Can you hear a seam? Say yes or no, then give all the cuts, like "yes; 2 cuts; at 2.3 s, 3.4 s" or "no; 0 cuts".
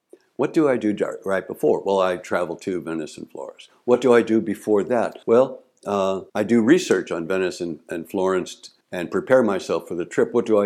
yes; 3 cuts; at 5.2 s, 6.3 s, 8.8 s